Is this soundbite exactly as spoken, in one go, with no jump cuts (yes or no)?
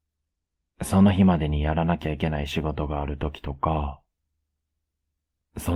yes